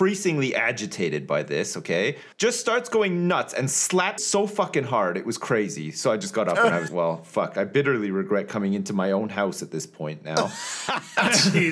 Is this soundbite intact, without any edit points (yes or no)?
no